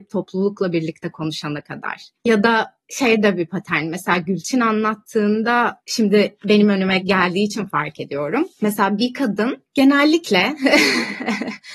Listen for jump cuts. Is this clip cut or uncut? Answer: cut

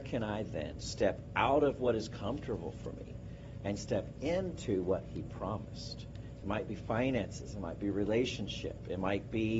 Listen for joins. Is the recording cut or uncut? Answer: uncut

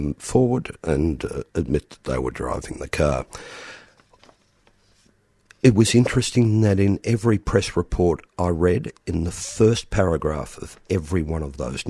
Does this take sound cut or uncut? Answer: uncut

